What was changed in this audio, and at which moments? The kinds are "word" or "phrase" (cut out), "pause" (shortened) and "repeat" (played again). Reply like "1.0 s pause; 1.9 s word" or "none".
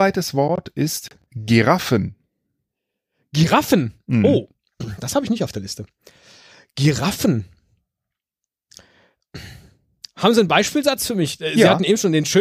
none